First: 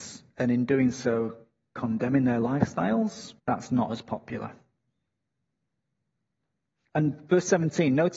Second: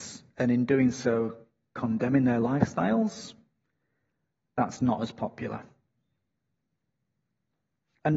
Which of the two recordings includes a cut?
first; 1 cut; at 3.4 s

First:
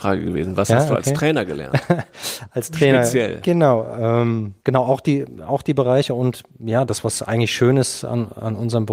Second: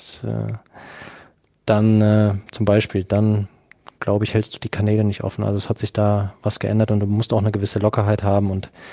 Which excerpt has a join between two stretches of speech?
first; 1 cut; at 4.6 s

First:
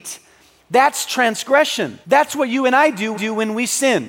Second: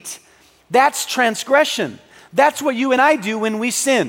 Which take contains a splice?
first; 2 cuts; at 2.0 s, 3.1 s

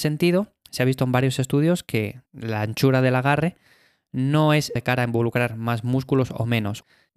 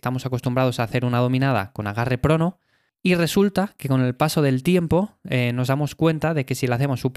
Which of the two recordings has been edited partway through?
first; 1 cut; at 4.8 s

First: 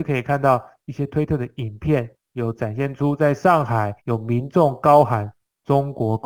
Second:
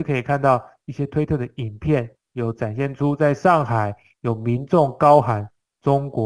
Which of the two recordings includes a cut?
first; 1 cut; at 4.0 s

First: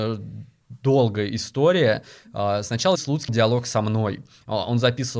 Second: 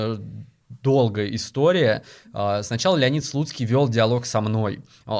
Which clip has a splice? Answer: first; 2 cuts; at 3.0 s, 3.3 s

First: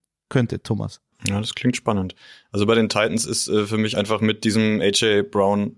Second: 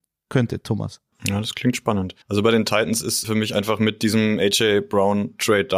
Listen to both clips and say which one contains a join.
second; 2 cuts; at 2.2 s, 3.2 s

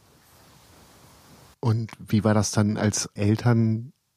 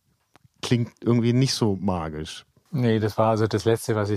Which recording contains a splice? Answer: first; 1 cut; at 3.2 s

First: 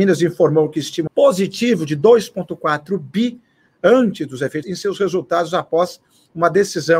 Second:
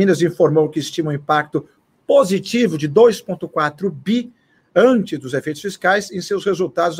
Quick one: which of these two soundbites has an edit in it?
first; 2 cuts; at 1.1 s, 4.6 s

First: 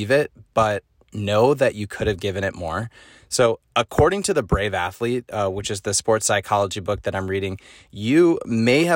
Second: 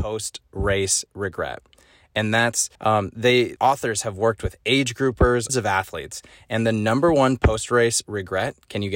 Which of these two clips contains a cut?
second; 3 cuts; at 2.7 s, 3.6 s, 5.5 s

